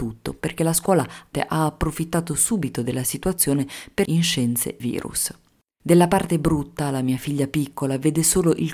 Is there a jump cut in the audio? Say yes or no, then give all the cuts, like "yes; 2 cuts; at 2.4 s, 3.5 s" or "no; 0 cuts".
yes; 3 cuts; at 1.3 s, 4.1 s, 4.8 s